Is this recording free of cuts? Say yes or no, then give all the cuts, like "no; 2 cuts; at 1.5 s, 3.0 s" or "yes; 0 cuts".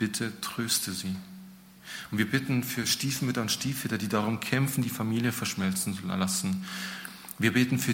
yes; 0 cuts